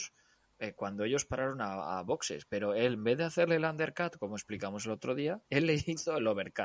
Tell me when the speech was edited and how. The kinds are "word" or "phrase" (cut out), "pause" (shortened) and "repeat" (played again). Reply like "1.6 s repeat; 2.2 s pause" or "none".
5.5 s pause